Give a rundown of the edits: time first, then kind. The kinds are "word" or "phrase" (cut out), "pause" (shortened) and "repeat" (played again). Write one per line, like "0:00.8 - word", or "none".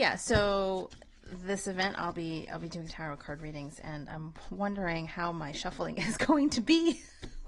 0:02.9 - word

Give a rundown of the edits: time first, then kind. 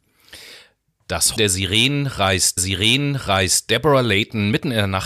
0:01.4 - word
0:02.6 - repeat

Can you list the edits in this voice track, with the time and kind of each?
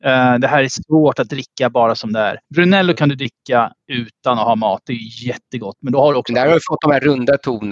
0:02.4 - pause

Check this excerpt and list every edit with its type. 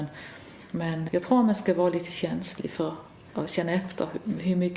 0:01.1 - word

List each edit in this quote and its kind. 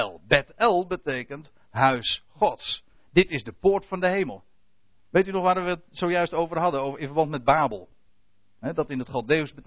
none

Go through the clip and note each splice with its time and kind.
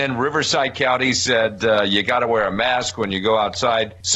none

